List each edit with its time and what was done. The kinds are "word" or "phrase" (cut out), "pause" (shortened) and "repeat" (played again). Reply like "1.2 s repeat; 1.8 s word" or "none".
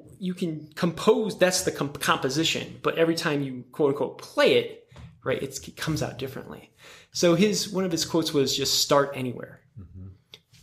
none